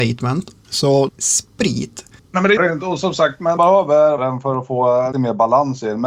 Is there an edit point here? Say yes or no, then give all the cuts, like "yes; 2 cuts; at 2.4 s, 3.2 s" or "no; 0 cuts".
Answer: yes; 5 cuts; at 1.1 s, 2.6 s, 3.6 s, 4.2 s, 5.1 s